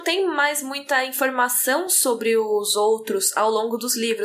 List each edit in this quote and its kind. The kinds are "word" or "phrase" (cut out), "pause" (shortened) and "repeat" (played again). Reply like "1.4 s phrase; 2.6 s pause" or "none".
none